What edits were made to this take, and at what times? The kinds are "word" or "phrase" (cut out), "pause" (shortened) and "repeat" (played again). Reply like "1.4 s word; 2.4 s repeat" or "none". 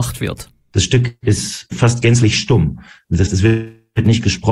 1.7 s word; 3.3 s word